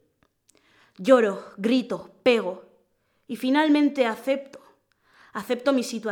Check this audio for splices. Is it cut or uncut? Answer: uncut